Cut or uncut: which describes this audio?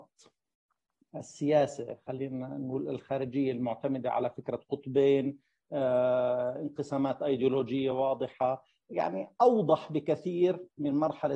uncut